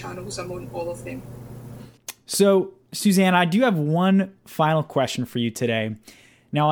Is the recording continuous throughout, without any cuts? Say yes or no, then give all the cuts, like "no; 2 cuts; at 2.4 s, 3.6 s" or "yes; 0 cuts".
yes; 0 cuts